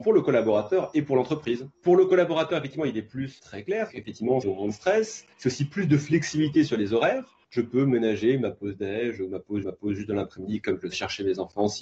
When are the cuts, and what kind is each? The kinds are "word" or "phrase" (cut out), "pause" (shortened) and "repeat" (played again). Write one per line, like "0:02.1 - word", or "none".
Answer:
0:01.7 - pause
0:03.4 - word
0:03.9 - word
0:04.4 - phrase
0:05.3 - pause
0:07.4 - pause
0:09.6 - repeat
0:10.9 - phrase